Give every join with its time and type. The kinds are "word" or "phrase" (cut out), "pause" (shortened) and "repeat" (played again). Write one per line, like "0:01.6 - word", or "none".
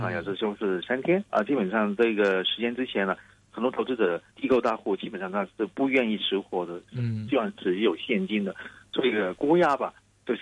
0:04.3 - pause